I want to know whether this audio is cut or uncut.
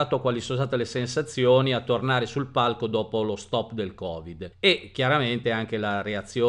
uncut